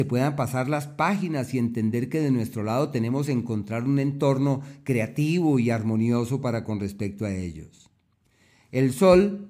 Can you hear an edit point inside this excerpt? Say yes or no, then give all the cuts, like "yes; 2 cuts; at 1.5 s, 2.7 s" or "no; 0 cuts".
no; 0 cuts